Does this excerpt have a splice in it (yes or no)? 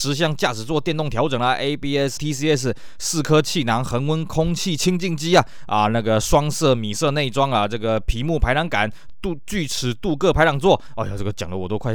yes